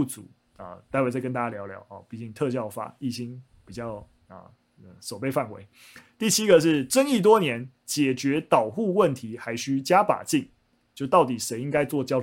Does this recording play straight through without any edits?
yes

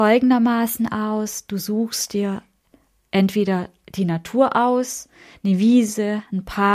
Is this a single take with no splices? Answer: yes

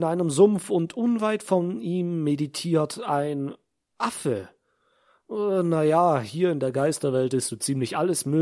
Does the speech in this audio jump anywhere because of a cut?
no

